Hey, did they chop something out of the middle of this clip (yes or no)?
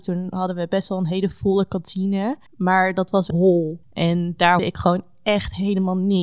yes